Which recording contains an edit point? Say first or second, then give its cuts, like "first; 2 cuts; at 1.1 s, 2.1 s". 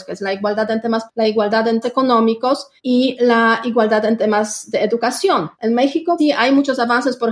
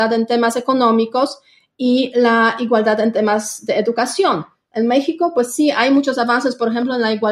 first; 5 cuts; at 1.1 s, 1.8 s, 2.8 s, 5.5 s, 6.2 s